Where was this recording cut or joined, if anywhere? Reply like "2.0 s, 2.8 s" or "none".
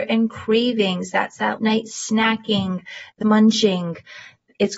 1.6 s, 3.2 s